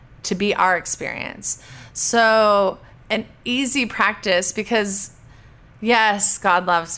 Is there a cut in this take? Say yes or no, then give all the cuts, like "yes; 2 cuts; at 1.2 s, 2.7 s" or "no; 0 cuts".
no; 0 cuts